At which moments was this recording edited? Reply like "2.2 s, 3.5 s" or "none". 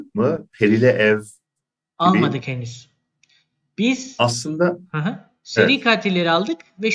none